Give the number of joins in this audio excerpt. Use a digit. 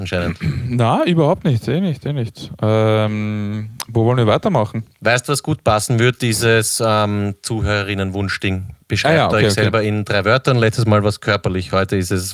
1